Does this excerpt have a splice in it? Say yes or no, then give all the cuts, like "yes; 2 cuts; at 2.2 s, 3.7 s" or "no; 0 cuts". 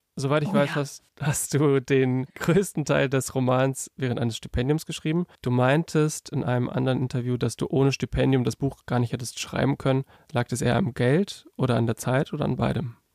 yes; 4 cuts; at 1.1 s, 2.3 s, 5.3 s, 10.2 s